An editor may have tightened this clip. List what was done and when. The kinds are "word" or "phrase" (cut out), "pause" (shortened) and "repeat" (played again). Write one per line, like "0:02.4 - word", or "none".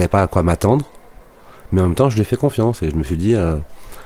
none